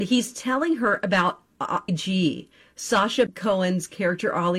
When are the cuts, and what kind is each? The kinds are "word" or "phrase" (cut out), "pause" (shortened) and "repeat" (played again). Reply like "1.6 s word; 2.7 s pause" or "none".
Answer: 1.9 s word; 3.3 s word

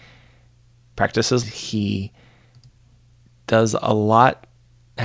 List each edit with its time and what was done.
1.4 s phrase

